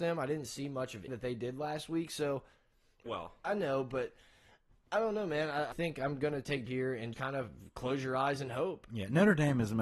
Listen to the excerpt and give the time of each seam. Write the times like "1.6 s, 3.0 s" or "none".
1.1 s, 3.1 s, 3.4 s, 5.7 s, 6.7 s, 7.1 s

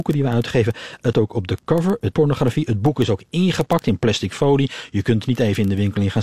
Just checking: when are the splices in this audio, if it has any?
1.1 s, 2.1 s

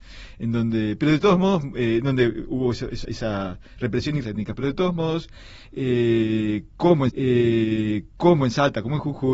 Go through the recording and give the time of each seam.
3.0 s, 4.2 s, 7.1 s

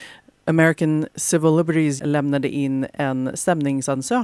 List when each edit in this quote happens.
2.0 s

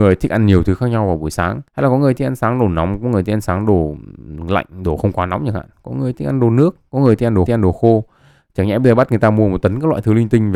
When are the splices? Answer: 1.7 s, 7.5 s

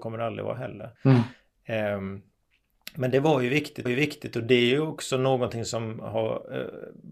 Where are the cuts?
1.0 s, 3.9 s

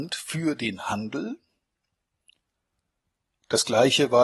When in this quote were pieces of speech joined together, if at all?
none

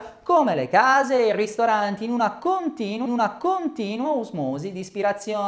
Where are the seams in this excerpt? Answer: 3.1 s

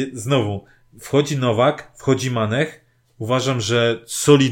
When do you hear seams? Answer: none

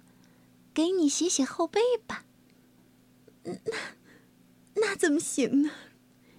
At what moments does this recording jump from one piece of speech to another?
none

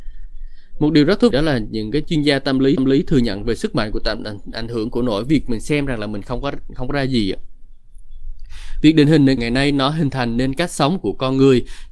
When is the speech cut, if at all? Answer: 1.3 s, 2.8 s, 9.4 s

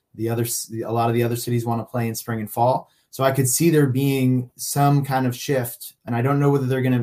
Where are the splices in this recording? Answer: 6.1 s

